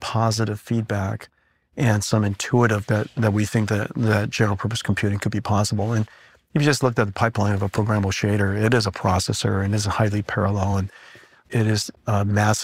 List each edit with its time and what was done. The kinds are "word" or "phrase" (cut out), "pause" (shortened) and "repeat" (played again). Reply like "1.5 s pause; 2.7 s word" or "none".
2.9 s phrase